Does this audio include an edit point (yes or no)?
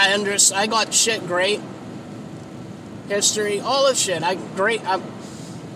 yes